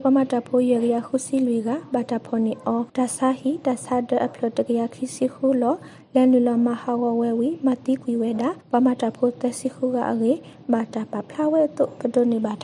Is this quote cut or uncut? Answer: cut